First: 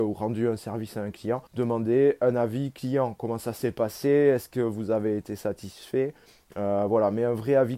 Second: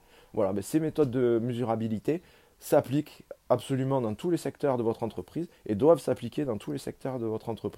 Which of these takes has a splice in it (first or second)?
first